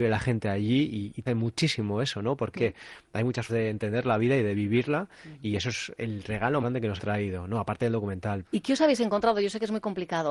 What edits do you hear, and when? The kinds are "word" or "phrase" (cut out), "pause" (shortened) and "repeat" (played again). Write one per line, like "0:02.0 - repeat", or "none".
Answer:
0:01.3 - word
0:02.5 - word
0:03.5 - word
0:06.6 - word
0:07.0 - word
0:08.4 - word